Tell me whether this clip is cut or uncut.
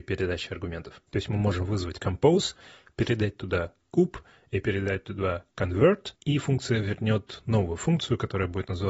uncut